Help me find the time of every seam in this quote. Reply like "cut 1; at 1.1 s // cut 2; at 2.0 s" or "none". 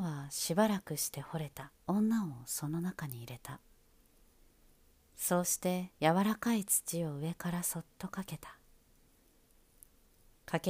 cut 1; at 1.8 s // cut 2; at 5.9 s